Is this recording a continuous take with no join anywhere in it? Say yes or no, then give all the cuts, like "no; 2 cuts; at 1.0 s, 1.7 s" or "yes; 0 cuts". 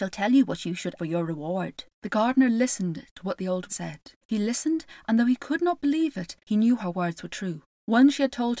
no; 6 cuts; at 1.0 s, 1.9 s, 3.7 s, 4.2 s, 6.4 s, 7.7 s